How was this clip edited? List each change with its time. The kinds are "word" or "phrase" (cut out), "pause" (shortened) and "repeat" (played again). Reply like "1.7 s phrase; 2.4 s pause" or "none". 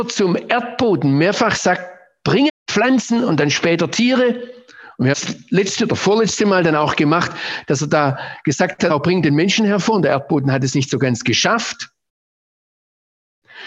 2.5 s word; 5.1 s word; 8.9 s word